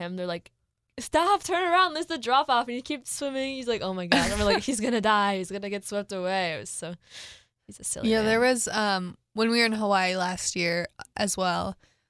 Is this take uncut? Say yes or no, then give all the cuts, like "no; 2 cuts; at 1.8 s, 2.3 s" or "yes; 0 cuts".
yes; 0 cuts